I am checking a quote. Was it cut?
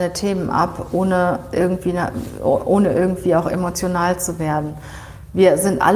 no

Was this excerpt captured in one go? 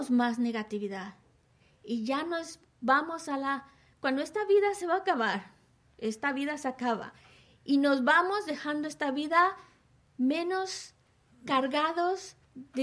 yes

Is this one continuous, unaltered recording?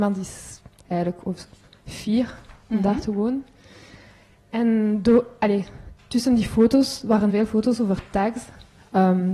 no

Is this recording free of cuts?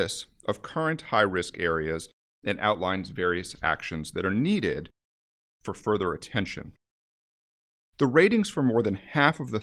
yes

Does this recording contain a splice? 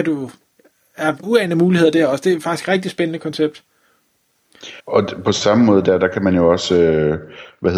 yes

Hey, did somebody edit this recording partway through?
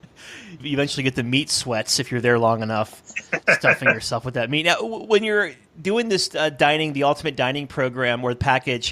no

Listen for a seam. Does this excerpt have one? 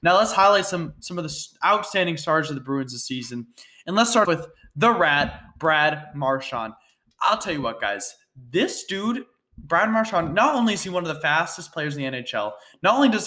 yes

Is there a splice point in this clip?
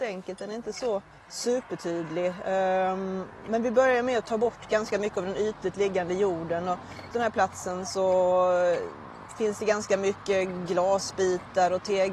yes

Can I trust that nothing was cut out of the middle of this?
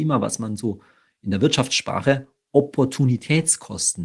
yes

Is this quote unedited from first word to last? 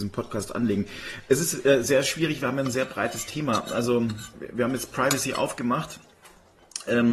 yes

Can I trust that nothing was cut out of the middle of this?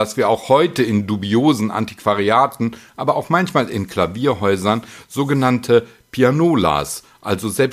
yes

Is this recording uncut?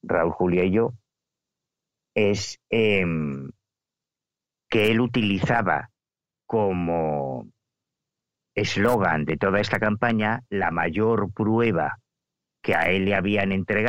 yes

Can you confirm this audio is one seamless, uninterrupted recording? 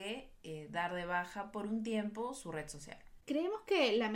yes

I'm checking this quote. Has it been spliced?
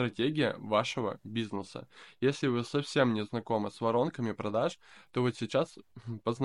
no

